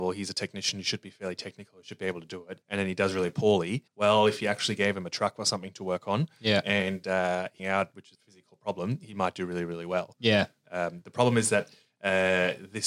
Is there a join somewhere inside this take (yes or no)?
yes